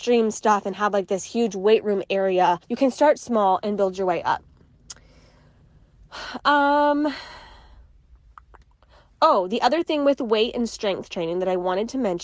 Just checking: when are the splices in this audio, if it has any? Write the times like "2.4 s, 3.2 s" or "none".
2.6 s